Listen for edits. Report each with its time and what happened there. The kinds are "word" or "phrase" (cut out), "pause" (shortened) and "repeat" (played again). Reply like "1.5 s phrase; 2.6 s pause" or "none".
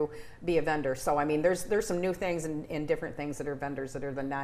none

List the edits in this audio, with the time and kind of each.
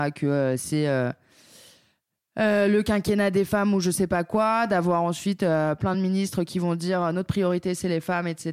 none

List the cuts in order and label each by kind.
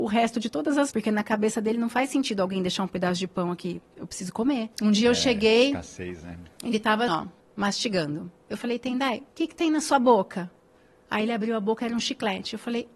0.9 s phrase; 4.7 s pause; 7.1 s word; 7.4 s pause; 9.3 s pause

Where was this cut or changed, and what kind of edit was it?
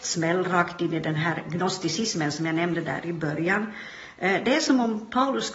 none

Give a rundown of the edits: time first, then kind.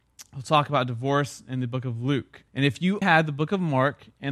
2.5 s pause; 3.0 s word

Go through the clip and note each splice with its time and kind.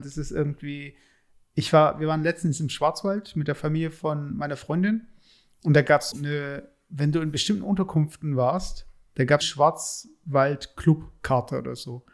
6.1 s word; 9.4 s word

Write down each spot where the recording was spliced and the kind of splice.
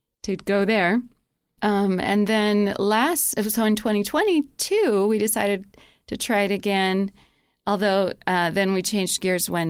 none

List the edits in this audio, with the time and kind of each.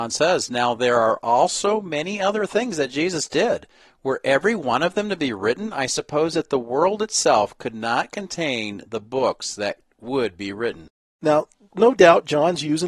none

